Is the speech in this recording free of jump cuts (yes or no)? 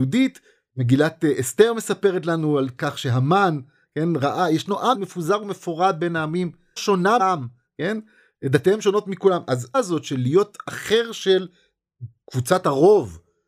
no